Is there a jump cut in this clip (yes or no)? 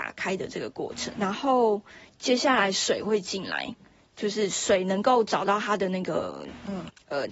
yes